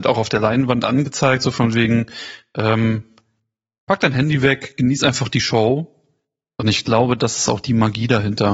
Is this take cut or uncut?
uncut